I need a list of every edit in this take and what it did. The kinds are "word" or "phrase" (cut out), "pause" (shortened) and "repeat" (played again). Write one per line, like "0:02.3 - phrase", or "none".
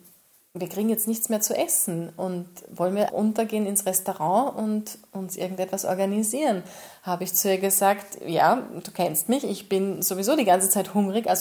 0:03.1 - word